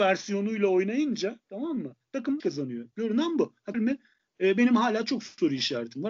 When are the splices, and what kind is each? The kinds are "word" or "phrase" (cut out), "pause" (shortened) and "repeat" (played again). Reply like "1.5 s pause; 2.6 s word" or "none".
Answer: 2.4 s word; 3.7 s phrase